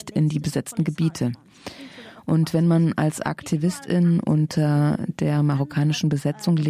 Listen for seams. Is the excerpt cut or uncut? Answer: uncut